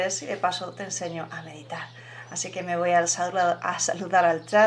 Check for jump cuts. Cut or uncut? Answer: uncut